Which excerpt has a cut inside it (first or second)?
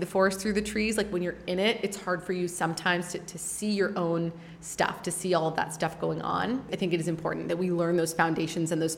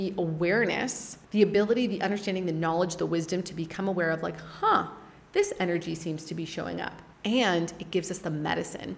second